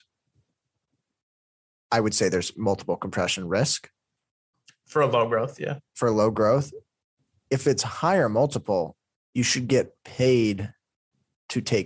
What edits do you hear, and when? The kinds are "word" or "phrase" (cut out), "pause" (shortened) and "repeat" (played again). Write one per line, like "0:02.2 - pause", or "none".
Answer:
0:05.9 - pause

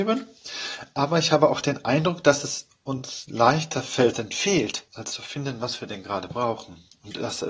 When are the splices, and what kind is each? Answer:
0:04.1 - phrase
0:04.9 - pause

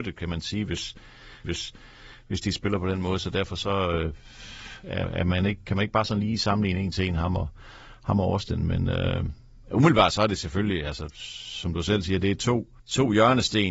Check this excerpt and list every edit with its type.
0:01.4 - repeat
0:05.0 - word
0:12.8 - pause

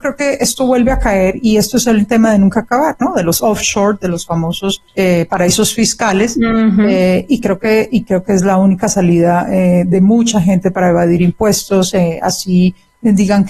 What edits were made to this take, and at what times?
0:04.9 - pause

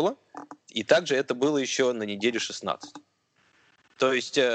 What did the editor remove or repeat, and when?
none

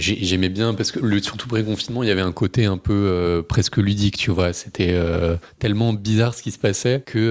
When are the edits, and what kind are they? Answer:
none

